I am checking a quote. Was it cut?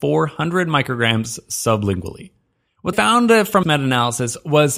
yes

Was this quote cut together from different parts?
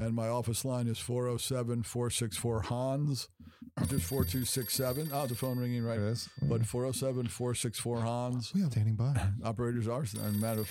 yes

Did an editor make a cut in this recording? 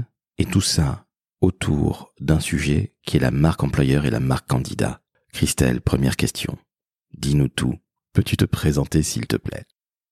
no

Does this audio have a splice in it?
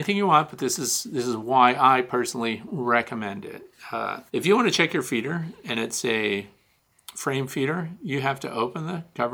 yes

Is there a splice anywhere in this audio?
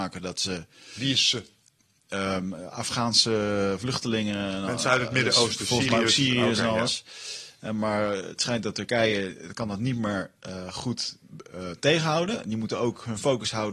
no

